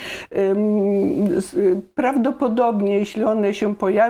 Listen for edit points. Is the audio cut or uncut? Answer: uncut